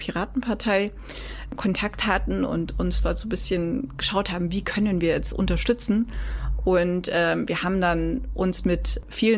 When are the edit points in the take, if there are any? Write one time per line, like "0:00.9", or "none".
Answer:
none